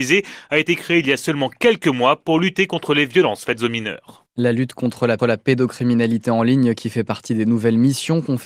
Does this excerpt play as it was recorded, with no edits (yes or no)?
no